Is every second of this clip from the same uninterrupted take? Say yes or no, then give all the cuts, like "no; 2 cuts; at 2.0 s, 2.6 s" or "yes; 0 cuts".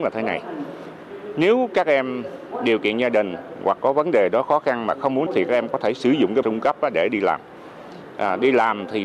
no; 3 cuts; at 3.8 s, 5.3 s, 6.4 s